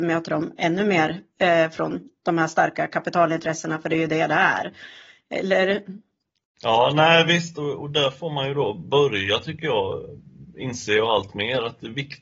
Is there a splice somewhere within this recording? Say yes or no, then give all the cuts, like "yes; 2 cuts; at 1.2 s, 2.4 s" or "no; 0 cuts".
no; 0 cuts